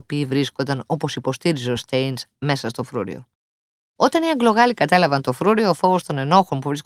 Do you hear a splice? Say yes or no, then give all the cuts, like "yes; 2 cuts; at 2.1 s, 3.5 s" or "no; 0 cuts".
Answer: no; 0 cuts